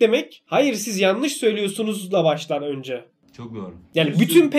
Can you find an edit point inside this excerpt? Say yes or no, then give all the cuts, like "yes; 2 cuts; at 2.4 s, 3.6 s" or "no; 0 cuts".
no; 0 cuts